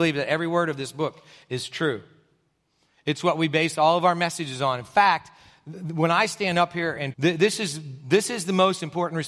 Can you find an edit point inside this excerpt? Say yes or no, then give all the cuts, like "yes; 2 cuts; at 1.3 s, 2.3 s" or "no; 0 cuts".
yes; 1 cut; at 7.1 s